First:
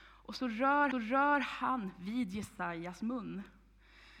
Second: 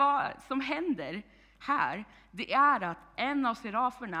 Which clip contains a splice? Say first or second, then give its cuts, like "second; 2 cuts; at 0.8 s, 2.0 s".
first; 1 cut; at 0.9 s